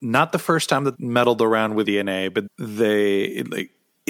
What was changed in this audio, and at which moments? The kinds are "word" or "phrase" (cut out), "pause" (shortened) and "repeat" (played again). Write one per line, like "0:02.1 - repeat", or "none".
0:00.9 - word
0:01.8 - word
0:02.5 - phrase